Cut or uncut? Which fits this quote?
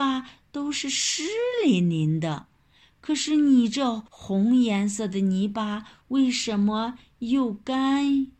cut